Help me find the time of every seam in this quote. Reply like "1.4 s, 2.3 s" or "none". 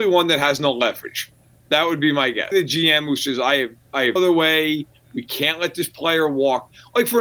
2.5 s, 4.2 s

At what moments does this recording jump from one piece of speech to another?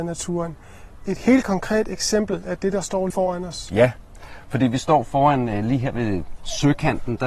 3.1 s

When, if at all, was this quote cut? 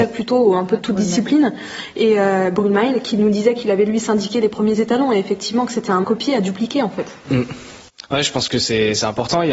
6.0 s

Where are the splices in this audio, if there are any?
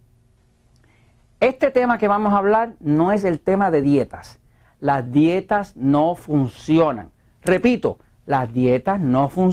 none

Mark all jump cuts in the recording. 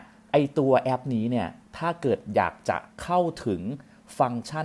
1.6 s, 2.9 s

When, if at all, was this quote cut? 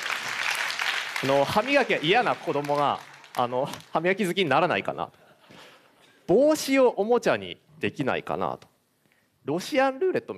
none

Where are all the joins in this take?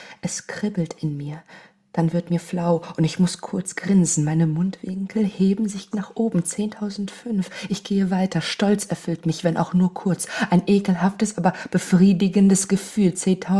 5.9 s

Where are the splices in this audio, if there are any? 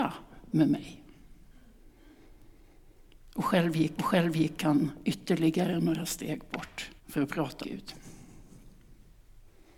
4.0 s, 7.0 s, 7.6 s

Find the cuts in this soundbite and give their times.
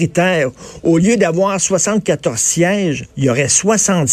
3.1 s

